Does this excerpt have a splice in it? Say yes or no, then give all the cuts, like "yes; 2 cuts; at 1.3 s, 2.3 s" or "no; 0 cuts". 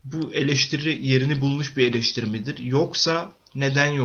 no; 0 cuts